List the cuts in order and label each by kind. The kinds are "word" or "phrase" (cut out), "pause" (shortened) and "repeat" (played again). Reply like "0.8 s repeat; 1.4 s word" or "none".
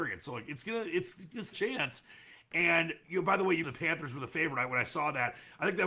1.5 s phrase; 3.6 s word

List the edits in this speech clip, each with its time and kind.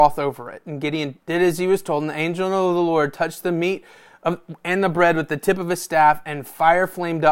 1.2 s pause

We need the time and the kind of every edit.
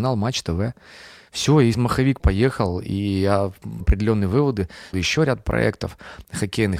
1.7 s word; 2.2 s word; 3.8 s word; 4.9 s word

